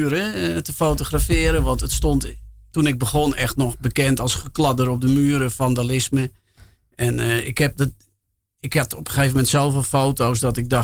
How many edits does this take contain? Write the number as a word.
zero